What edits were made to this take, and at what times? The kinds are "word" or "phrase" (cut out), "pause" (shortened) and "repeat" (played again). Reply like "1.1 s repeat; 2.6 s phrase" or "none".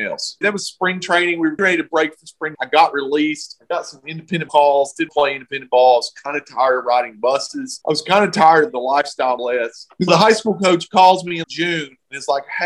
1.6 s word; 2.5 s word; 4.5 s word; 5.1 s word; 9.4 s word; 10.1 s word; 11.4 s word